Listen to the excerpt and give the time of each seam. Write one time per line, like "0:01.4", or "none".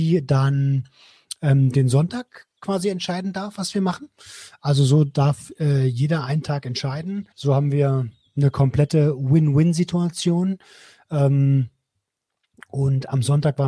0:07.3